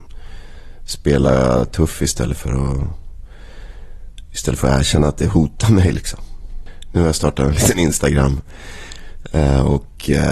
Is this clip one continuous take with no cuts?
yes; 0 cuts

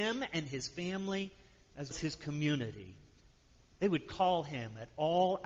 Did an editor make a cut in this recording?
yes; 1 cut; at 1.9 s

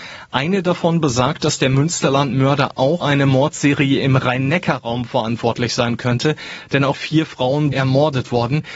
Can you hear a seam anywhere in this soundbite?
yes; 3 cuts; at 3.0 s, 6.9 s, 7.7 s

